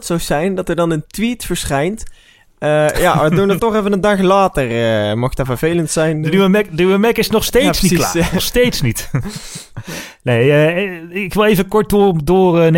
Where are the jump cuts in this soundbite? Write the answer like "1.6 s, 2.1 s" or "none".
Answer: 3.6 s